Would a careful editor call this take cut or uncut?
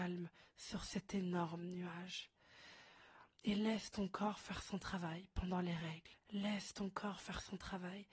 cut